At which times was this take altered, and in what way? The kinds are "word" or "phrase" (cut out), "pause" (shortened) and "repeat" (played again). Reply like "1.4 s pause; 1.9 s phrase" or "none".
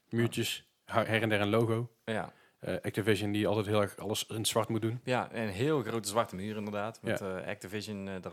none